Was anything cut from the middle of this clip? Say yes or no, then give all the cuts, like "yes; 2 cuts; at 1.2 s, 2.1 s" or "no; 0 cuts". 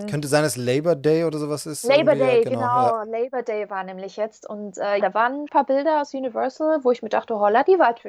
yes; 2 cuts; at 5.0 s, 5.5 s